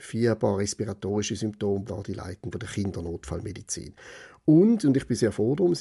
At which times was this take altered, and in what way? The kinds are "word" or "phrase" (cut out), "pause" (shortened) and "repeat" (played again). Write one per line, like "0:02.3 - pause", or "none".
0:01.9 - phrase
0:02.5 - word